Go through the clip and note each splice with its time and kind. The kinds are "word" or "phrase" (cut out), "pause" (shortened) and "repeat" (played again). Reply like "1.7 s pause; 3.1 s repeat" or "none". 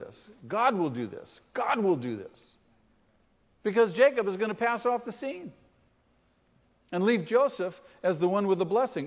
none